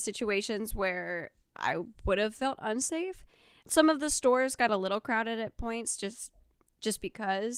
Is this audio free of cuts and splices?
yes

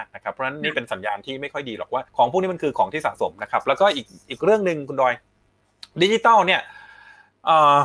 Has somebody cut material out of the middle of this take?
yes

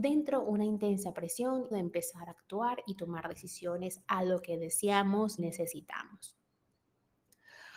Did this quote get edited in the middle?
yes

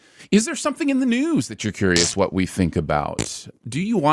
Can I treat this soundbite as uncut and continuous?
yes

